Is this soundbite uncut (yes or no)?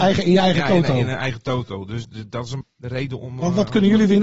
no